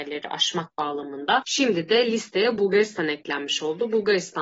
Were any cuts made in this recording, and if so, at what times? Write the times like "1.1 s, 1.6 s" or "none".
none

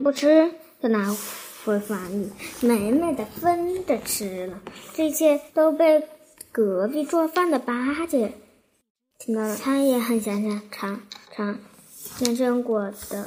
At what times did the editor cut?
5.5 s, 11.2 s

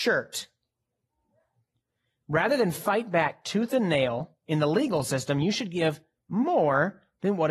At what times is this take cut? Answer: none

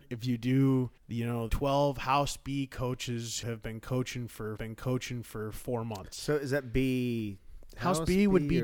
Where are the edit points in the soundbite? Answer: 1.0 s, 1.5 s, 3.4 s, 4.6 s

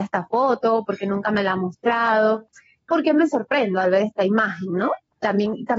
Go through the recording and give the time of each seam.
2.9 s

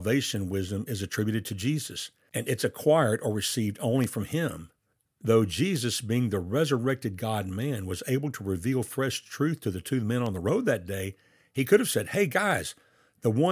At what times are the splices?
none

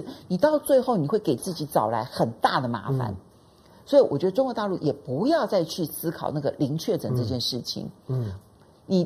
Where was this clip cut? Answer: none

